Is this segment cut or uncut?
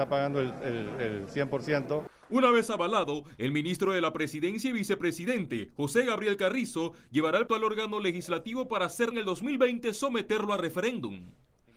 cut